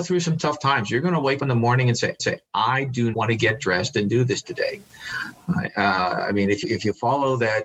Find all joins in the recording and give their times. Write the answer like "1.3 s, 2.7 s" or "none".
1.4 s, 2.2 s, 3.1 s, 6.6 s

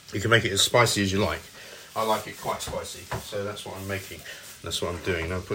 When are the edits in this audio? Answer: none

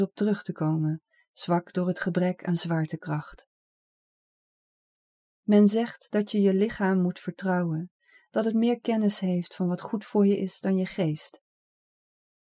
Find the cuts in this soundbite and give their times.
none

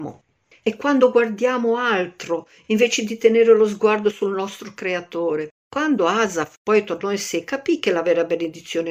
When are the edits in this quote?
5.6 s

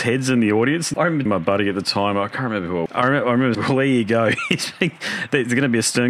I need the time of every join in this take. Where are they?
0.9 s, 1.3 s, 2.9 s, 3.5 s

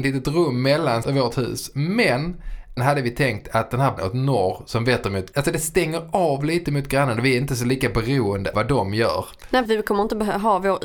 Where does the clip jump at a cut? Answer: 1.0 s, 2.8 s, 4.0 s, 5.3 s, 8.5 s, 9.7 s

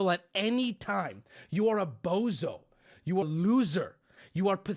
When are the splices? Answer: 3.2 s

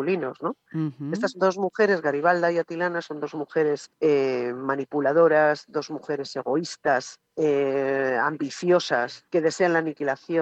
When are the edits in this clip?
3.9 s, 7.3 s, 9.3 s

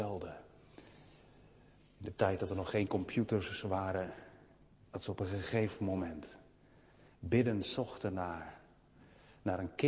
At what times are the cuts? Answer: none

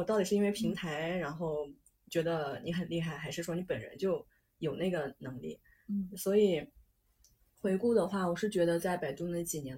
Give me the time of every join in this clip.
none

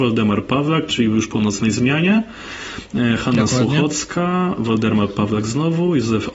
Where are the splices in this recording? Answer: none

